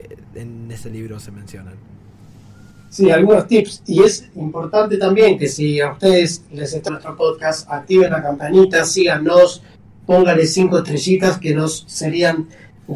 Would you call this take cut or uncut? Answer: cut